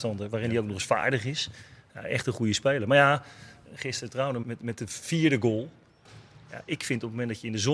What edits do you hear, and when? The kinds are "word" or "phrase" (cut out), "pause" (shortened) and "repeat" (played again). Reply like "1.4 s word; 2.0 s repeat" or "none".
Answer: 3.6 s word; 4.4 s word